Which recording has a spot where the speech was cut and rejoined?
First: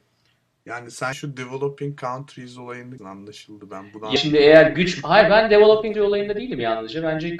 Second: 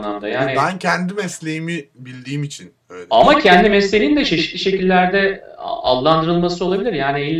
first; 4 cuts; at 1.1 s, 3.0 s, 4.2 s, 5.9 s

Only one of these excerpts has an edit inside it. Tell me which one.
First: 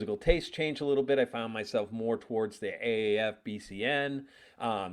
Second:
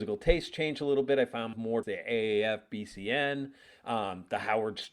second; 2 cuts; at 1.5 s, 1.8 s

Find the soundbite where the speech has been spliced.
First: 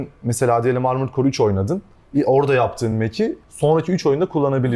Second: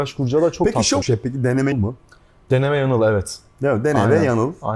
second; 2 cuts; at 1.0 s, 1.7 s

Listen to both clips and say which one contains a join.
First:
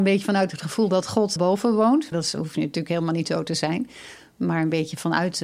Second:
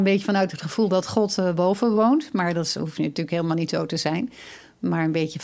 first; 2 cuts; at 1.4 s, 2.1 s

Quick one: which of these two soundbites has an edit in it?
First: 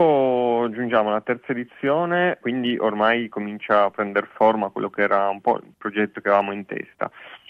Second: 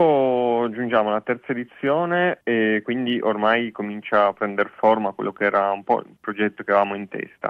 first; 1 cut; at 2.4 s

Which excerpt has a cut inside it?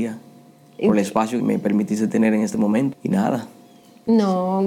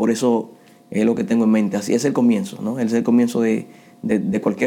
first; 2 cuts; at 1.4 s, 2.9 s

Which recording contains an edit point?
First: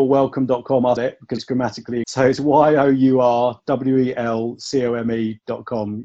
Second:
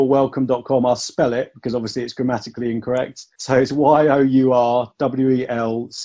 first; 3 cuts; at 1.0 s, 1.4 s, 2.0 s

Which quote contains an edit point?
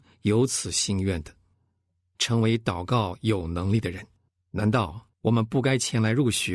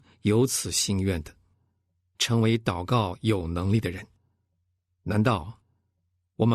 first; 2 cuts; at 4.3 s, 5.1 s

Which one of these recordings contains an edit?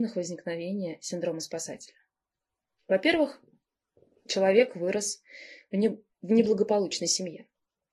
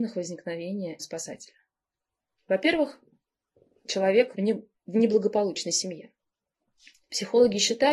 second; 2 cuts; at 1.0 s, 4.3 s

